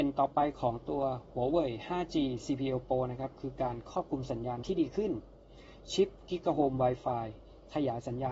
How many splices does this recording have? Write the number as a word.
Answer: one